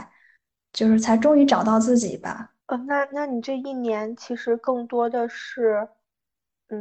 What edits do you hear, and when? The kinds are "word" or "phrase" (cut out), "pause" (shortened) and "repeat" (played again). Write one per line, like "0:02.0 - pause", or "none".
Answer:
0:02.6 - pause

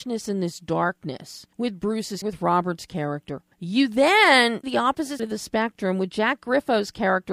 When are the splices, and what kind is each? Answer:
0:01.5 - pause
0:02.2 - word
0:03.5 - pause
0:04.6 - phrase
0:05.2 - word

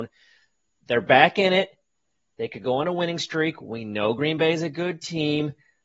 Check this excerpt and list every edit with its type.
none

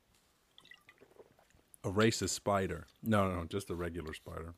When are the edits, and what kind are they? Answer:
none

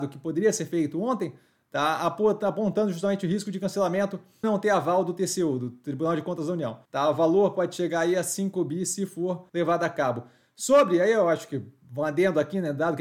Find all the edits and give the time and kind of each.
0:04.4 - word
0:06.8 - pause
0:09.5 - pause

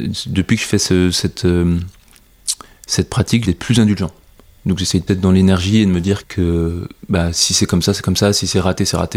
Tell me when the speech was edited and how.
0:03.4 - word
0:05.1 - word
0:06.2 - word

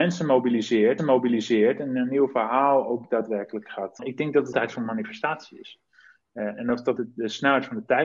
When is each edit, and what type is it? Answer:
0:01.0 - repeat
0:04.0 - phrase
0:04.5 - phrase
0:07.0 - word

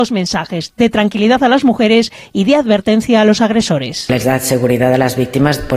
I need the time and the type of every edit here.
none

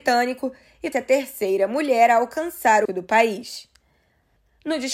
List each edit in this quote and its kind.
0:00.9 - word
0:02.9 - phrase

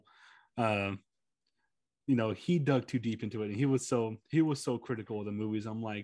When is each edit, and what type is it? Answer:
none

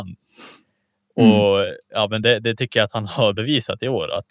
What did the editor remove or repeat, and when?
none

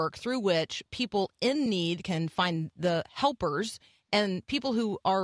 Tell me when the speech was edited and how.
none

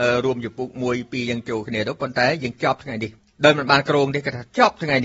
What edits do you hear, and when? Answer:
0:03.2 - pause

